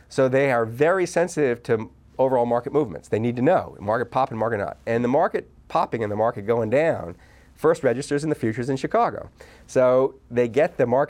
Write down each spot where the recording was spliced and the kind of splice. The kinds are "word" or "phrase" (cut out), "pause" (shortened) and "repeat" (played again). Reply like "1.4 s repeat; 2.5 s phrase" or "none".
none